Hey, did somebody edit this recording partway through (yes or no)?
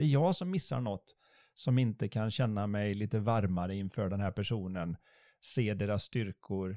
no